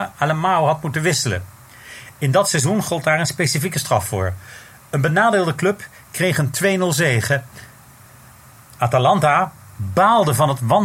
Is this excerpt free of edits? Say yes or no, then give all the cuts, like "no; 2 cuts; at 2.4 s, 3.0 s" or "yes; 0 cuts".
yes; 0 cuts